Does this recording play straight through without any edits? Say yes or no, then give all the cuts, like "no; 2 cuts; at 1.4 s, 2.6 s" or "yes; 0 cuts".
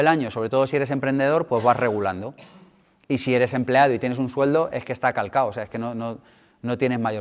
yes; 0 cuts